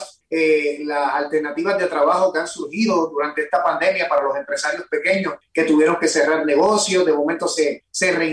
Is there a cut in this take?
no; 0 cuts

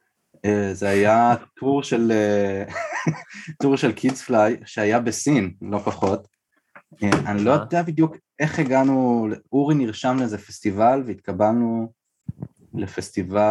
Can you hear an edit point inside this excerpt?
no; 0 cuts

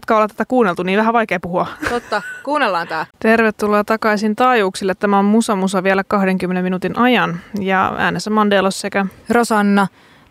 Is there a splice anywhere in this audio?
yes; 1 cut; at 3.1 s

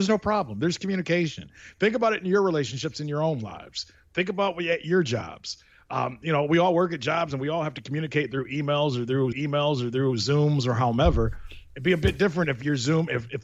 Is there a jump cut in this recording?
yes; 1 cut; at 9.3 s

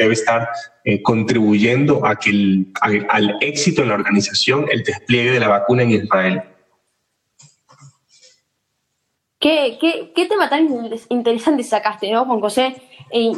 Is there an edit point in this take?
no; 0 cuts

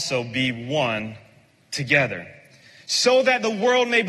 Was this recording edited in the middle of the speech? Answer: no; 0 cuts

